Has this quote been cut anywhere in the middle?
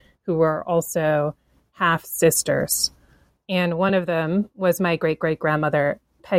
no; 0 cuts

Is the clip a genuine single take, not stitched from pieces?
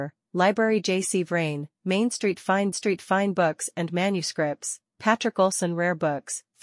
no; 1 cut; at 2.7 s

